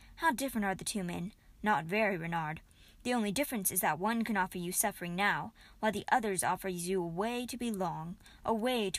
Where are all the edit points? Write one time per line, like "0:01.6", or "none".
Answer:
none